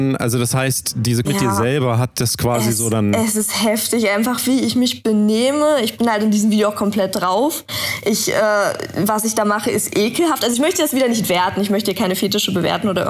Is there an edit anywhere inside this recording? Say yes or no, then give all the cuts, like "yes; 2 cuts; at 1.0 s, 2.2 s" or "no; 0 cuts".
yes; 1 cut; at 1.2 s